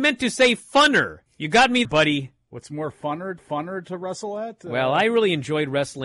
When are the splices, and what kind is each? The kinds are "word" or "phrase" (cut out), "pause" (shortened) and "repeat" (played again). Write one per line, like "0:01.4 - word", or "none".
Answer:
0:01.3 - pause
0:01.8 - word
0:03.4 - repeat